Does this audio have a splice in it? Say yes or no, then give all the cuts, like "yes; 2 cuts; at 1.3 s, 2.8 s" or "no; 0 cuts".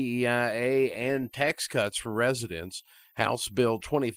no; 0 cuts